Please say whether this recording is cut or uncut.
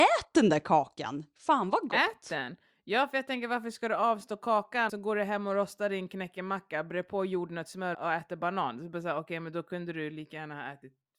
cut